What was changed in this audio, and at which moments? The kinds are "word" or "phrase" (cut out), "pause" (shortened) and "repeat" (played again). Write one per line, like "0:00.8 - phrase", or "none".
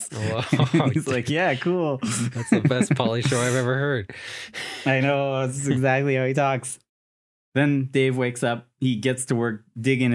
none